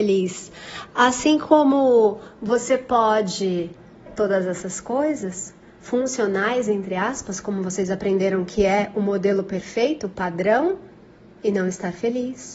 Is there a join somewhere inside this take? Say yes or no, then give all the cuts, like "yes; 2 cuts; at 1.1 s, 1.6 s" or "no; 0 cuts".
yes; 1 cut; at 4.1 s